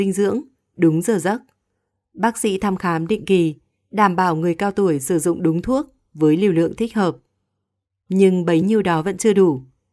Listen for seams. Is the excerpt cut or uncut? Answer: uncut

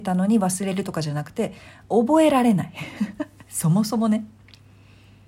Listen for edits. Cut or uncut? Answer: uncut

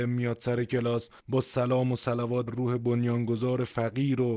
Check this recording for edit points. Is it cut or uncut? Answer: cut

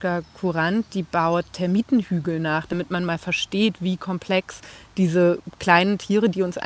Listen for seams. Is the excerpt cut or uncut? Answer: uncut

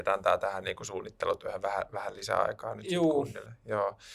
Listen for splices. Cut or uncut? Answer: uncut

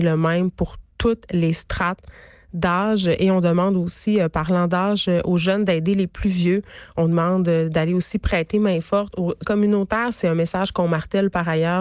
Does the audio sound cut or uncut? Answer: cut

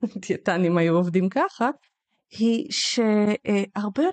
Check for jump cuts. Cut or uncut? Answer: uncut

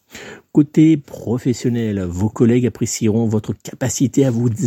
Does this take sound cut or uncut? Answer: uncut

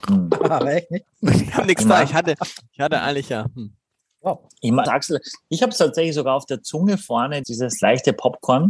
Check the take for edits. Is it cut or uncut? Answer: cut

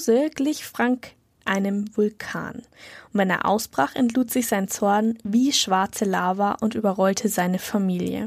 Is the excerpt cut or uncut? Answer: uncut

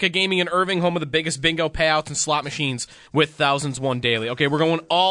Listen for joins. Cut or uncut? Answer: cut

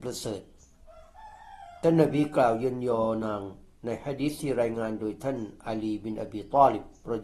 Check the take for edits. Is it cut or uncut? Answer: uncut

